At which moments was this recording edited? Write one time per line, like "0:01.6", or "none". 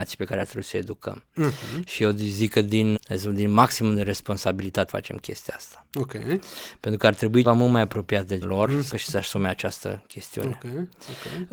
0:02.9
0:04.9
0:07.4
0:08.4
0:08.9